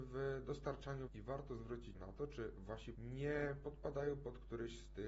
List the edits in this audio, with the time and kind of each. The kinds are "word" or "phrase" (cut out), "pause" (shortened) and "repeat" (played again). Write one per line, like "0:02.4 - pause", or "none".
0:01.1 - word
0:01.9 - word
0:02.9 - word